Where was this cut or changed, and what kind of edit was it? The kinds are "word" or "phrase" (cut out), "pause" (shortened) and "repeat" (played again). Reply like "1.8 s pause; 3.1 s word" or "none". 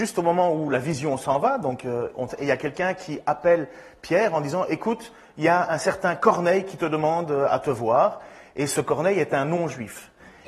2.3 s phrase